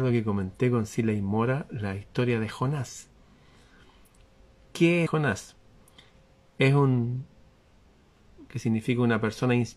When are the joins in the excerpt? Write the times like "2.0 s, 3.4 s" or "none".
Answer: 5.1 s, 8.5 s